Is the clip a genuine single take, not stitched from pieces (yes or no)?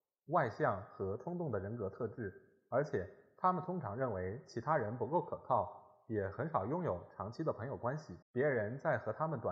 no